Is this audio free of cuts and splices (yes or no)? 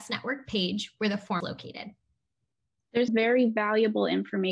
no